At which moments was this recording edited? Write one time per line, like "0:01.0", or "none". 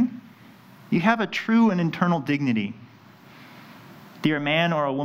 none